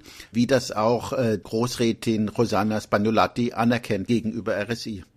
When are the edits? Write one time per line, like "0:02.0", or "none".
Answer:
0:01.4
0:04.1

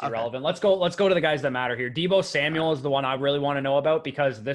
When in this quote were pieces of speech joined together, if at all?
none

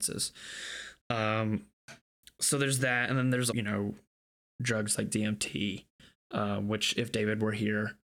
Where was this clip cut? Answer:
0:03.5

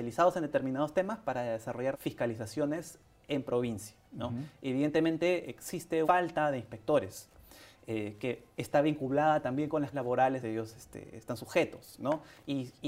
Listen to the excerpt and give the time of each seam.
0:01.9
0:04.0
0:06.0
0:09.9
0:10.4

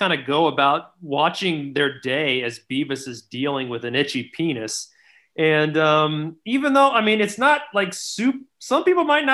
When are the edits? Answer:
none

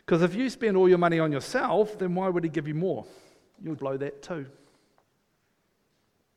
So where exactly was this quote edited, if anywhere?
0:03.8

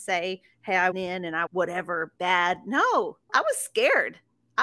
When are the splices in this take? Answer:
0:00.9
0:01.5
0:02.2
0:03.3

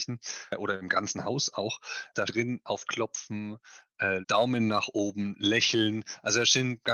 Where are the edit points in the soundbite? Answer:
0:02.3
0:02.8
0:04.2

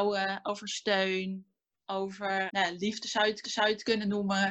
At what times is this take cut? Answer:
0:02.5
0:03.4

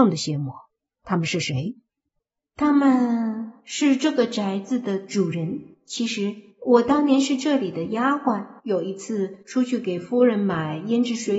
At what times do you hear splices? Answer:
0:02.2
0:03.6
0:05.7
0:06.5
0:08.6
0:09.4

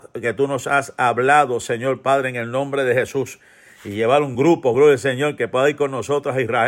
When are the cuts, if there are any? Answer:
none

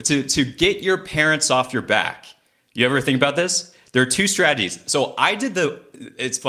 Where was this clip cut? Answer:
none

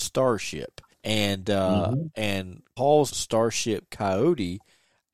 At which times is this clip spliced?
0:00.9
0:02.8
0:03.1

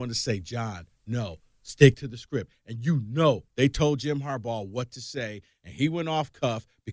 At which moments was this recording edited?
none

